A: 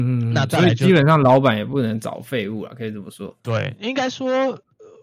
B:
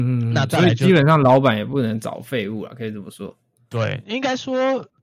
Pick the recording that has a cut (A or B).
A